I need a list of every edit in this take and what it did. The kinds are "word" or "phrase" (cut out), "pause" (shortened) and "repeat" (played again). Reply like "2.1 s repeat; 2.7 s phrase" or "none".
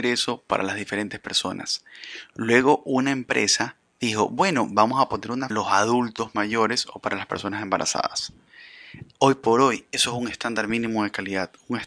5.5 s phrase